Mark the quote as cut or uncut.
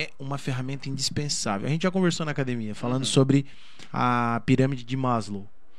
uncut